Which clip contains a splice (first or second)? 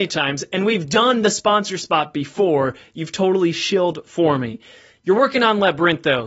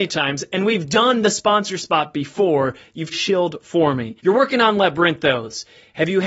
second